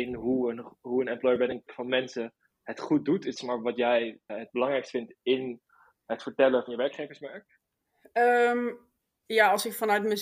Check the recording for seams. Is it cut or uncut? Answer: cut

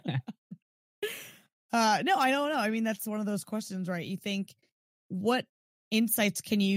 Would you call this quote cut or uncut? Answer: uncut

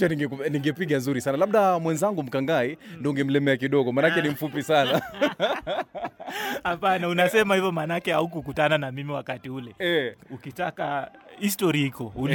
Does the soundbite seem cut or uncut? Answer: uncut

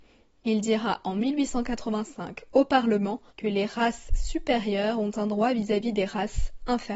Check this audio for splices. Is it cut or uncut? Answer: cut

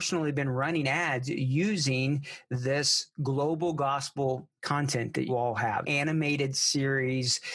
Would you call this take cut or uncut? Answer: cut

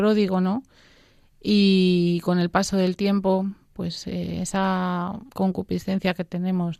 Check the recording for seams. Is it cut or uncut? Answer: cut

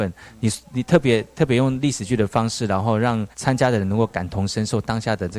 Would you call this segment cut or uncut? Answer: cut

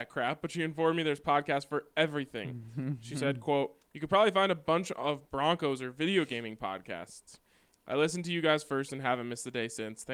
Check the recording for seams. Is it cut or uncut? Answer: uncut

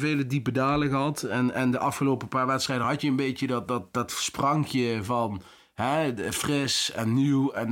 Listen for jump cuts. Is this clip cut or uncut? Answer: uncut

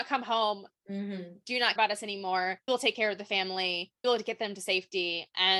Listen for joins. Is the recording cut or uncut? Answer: cut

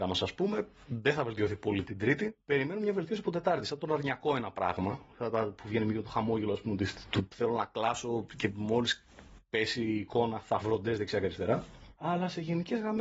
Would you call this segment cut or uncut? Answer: cut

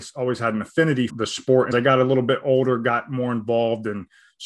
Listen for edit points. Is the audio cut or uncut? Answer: cut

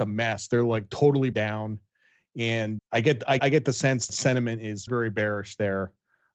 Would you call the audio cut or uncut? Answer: cut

